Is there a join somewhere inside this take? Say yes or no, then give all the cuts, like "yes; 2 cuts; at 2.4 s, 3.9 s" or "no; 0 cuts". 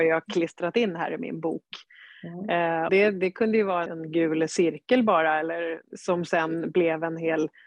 yes; 3 cuts; at 2.9 s, 3.9 s, 5.9 s